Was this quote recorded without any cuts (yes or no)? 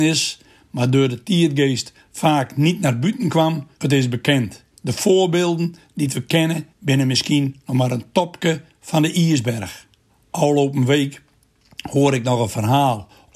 no